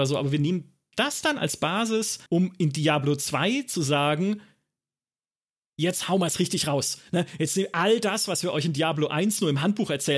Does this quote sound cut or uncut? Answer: cut